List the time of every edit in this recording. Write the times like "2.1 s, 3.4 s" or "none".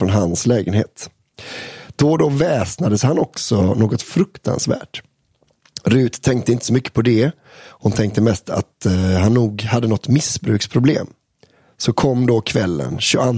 none